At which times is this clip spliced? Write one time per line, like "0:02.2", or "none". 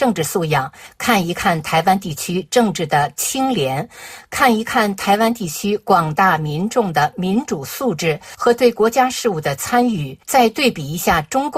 0:10.2